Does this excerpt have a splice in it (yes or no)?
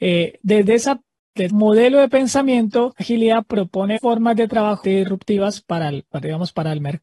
yes